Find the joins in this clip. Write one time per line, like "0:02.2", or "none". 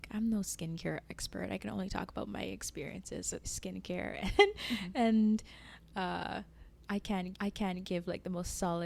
0:03.4
0:07.3